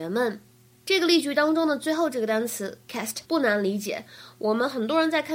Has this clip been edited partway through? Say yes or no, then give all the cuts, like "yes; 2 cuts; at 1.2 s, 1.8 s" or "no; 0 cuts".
yes; 1 cut; at 3.2 s